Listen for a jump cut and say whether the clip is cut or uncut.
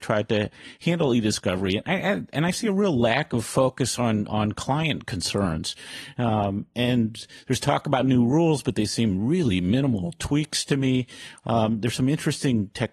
uncut